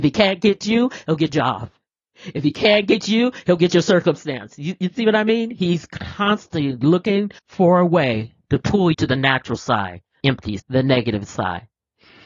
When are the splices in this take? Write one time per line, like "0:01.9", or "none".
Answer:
0:01.3
0:07.4
0:08.4
0:08.9
0:10.2
0:10.6